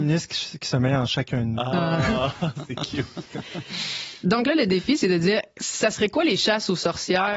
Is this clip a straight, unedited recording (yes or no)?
yes